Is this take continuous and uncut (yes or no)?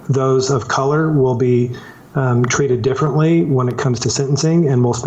yes